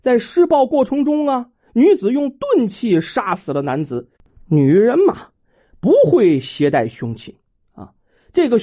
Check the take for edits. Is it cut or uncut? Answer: uncut